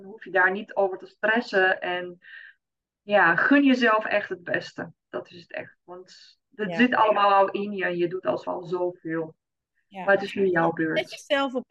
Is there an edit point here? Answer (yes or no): yes